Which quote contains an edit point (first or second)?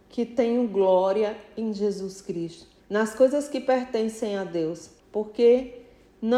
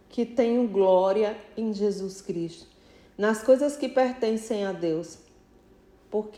first